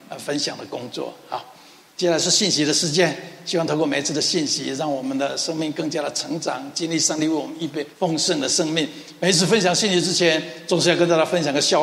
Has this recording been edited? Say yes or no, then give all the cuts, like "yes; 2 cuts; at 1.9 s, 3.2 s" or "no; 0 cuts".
yes; 1 cut; at 7.9 s